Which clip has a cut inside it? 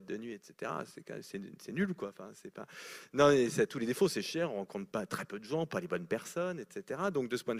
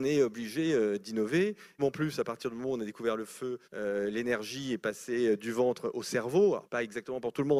second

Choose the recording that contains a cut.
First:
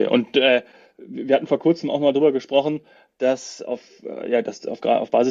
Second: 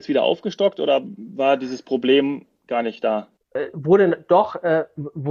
second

